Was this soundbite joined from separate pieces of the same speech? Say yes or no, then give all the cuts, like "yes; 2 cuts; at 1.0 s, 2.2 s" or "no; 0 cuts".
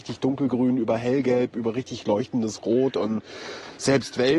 no; 0 cuts